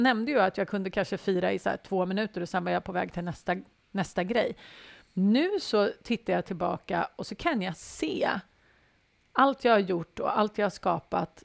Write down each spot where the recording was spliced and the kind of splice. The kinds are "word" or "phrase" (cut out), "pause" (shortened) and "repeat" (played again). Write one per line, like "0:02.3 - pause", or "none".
none